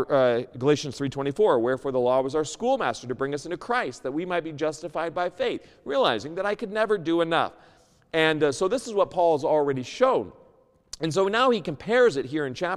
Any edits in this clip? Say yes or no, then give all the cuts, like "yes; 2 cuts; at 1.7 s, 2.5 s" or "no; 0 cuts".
no; 0 cuts